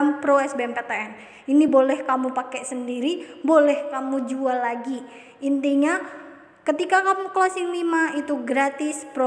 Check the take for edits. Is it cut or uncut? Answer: uncut